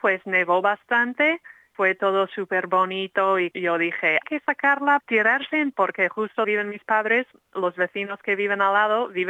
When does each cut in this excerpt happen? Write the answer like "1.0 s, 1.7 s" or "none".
1.7 s, 3.5 s, 4.2 s, 5.0 s, 5.7 s, 6.4 s